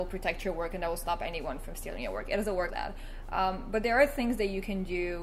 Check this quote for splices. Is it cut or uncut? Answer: cut